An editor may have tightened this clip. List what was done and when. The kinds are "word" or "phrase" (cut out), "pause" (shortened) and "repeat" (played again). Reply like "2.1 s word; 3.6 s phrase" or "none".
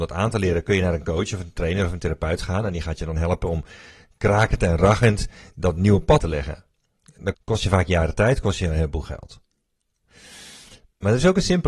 6.2 s word; 7.3 s phrase